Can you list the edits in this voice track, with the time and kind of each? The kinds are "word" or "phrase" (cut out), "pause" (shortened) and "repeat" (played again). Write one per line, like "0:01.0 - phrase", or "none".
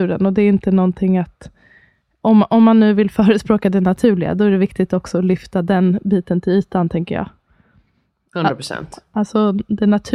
none